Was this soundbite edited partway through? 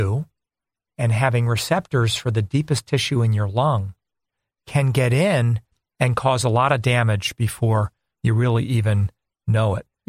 no; 0 cuts

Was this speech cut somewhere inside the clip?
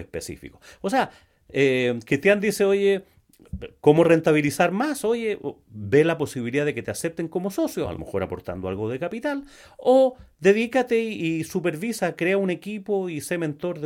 no; 0 cuts

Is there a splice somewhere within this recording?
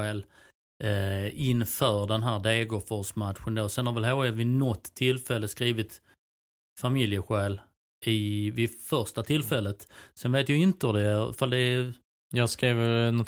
no; 0 cuts

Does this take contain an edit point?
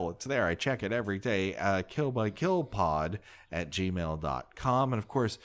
no; 0 cuts

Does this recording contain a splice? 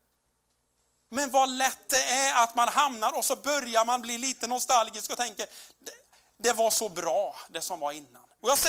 no; 0 cuts

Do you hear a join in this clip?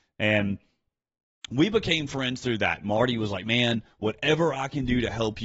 no; 0 cuts

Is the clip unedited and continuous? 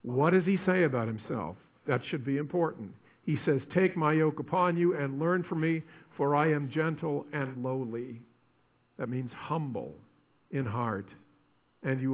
yes; 0 cuts

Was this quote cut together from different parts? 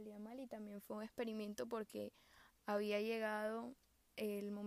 no; 0 cuts

